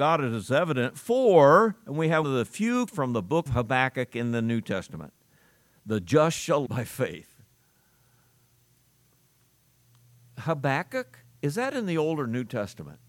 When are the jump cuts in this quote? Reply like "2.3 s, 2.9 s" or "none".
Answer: 2.2 s, 2.9 s, 3.5 s, 6.7 s